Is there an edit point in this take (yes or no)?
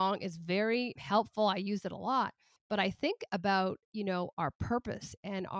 yes